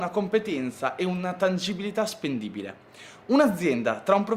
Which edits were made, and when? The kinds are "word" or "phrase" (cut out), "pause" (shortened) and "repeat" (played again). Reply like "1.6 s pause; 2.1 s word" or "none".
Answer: none